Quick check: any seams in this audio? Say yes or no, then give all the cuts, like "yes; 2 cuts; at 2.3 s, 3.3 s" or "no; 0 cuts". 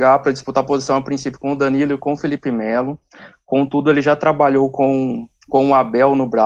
no; 0 cuts